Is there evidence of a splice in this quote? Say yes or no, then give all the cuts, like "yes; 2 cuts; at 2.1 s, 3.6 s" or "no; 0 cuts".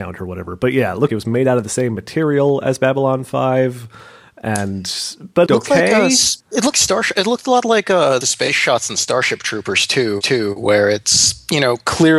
yes; 6 cuts; at 1.1 s, 5.5 s, 6.4 s, 6.7 s, 8.2 s, 10.2 s